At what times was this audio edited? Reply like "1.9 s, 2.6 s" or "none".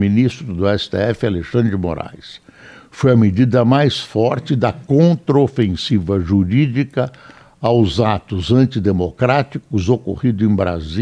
none